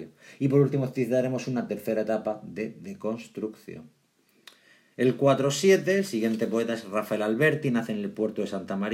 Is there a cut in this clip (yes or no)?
no